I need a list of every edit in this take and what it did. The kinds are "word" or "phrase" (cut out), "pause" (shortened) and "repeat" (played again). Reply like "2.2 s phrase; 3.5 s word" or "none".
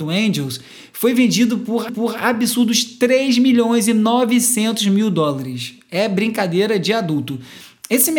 1.9 s repeat